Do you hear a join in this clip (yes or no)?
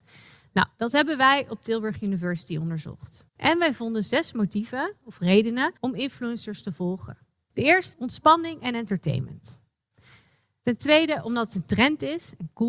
yes